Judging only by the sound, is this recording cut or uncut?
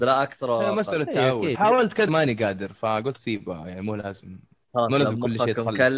cut